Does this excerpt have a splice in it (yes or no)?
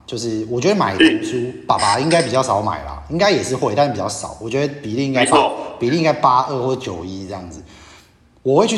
no